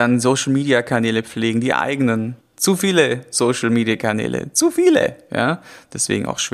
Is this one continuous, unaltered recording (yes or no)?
no